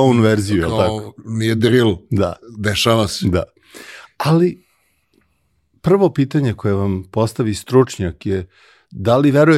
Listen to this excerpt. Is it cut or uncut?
uncut